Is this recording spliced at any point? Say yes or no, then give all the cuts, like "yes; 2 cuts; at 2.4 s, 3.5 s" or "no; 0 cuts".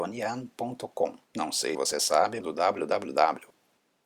yes; 3 cuts; at 1.2 s, 1.7 s, 2.4 s